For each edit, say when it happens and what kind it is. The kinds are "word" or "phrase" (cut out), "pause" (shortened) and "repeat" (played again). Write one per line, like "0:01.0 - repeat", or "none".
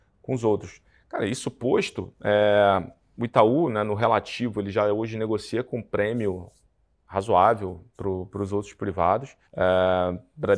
0:09.5 - pause